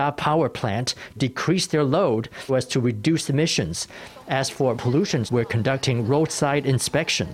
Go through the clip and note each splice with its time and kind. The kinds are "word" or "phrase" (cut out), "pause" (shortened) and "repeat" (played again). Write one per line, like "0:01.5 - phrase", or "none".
0:01.2 - word
0:02.5 - word
0:04.7 - word
0:05.3 - word